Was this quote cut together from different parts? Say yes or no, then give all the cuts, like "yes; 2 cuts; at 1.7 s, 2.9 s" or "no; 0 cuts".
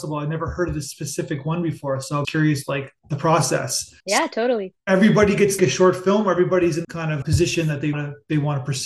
yes; 8 cuts; at 2.2 s, 3.0 s, 4.0 s, 4.8 s, 5.6 s, 6.8 s, 7.2 s, 7.9 s